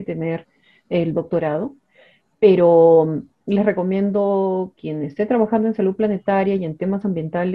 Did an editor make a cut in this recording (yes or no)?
no